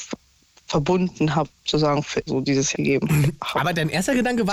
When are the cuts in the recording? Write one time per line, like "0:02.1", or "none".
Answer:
0:01.6
0:02.3
0:02.7